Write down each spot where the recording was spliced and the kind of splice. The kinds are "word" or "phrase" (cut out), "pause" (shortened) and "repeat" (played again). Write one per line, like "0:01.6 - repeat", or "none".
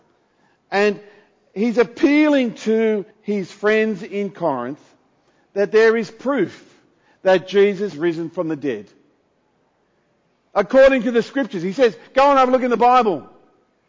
0:03.1 - pause
0:07.9 - word